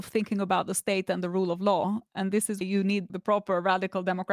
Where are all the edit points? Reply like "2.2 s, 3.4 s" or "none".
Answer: 2.6 s, 3.1 s